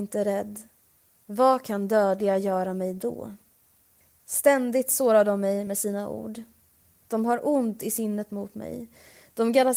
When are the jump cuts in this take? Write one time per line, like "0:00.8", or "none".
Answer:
none